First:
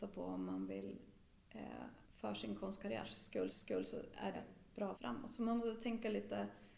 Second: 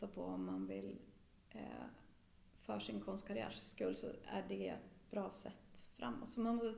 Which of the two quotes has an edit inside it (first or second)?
first